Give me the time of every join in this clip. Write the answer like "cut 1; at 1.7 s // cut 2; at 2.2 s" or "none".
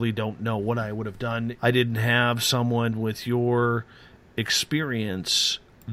cut 1; at 1.6 s